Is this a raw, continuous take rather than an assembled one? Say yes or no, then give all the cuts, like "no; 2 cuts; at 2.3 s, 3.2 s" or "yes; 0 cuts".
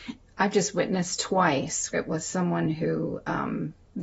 no; 1 cut; at 1.9 s